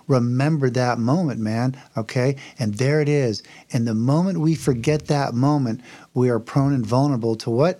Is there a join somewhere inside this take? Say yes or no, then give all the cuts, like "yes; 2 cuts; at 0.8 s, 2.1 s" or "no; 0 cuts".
no; 0 cuts